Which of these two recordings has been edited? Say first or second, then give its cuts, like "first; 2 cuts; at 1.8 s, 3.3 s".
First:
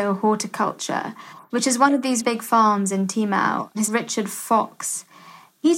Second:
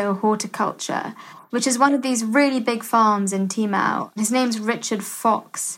first; 2 cuts; at 2.2 s, 3.9 s